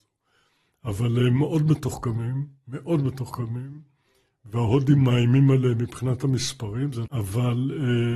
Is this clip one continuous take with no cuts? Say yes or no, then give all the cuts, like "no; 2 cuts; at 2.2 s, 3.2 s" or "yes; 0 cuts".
no; 1 cut; at 7.1 s